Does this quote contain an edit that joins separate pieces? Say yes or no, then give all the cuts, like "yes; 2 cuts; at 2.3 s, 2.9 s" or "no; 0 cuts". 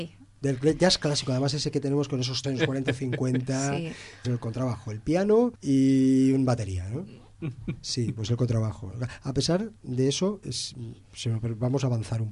yes; 5 cuts; at 2.4 s, 4.2 s, 5.5 s, 9.8 s, 10.4 s